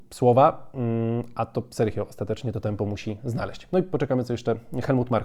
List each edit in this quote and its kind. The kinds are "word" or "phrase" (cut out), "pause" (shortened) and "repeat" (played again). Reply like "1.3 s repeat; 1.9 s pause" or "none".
none